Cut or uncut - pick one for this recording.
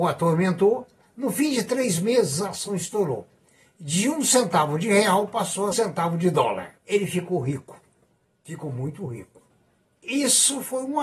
cut